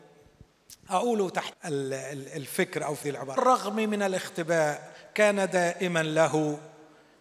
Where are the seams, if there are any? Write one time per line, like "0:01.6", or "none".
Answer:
0:01.5
0:03.0
0:03.4

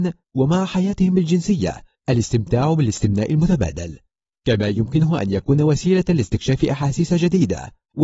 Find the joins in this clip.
none

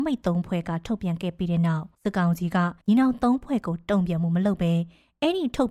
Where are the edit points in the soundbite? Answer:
0:01.9
0:02.8

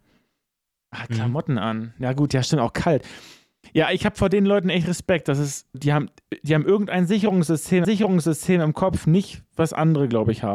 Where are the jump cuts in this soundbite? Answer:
0:05.7
0:07.8

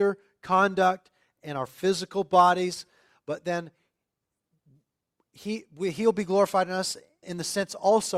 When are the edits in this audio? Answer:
0:07.2

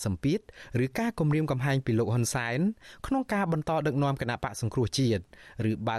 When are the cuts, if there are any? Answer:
none

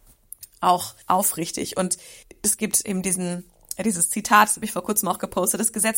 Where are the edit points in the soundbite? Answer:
0:01.0
0:02.2

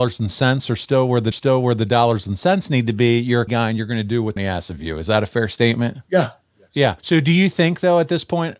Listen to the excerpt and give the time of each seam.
0:01.3
0:03.5
0:04.4
0:06.0
0:07.0

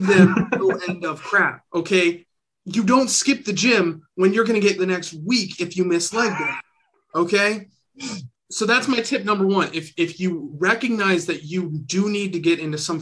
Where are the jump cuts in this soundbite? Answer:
0:01.7
0:04.8

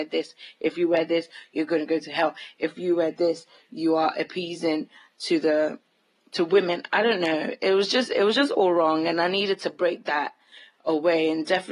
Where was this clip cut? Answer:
none

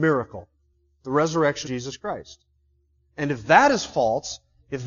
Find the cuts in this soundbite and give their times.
0:01.6

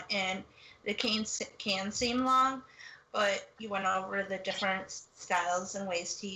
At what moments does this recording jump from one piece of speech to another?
none

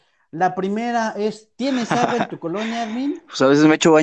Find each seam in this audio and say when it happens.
none

